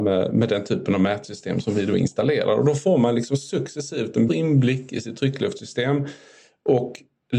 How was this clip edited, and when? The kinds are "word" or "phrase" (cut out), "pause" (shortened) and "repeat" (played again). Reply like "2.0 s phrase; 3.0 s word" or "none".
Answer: 4.3 s word